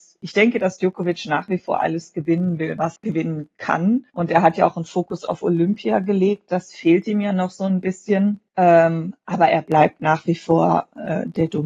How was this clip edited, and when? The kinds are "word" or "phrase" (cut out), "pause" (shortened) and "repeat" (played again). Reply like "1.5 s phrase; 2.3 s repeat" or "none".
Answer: 3.0 s word; 4.1 s pause; 8.5 s pause